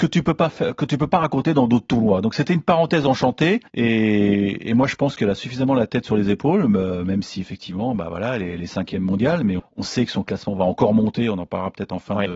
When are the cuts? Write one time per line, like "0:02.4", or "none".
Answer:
0:03.7
0:09.6